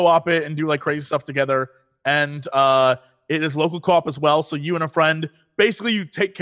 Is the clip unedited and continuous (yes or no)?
yes